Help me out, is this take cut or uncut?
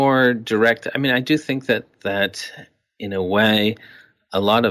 uncut